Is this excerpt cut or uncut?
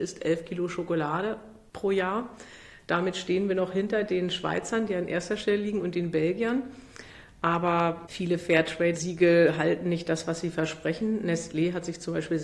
uncut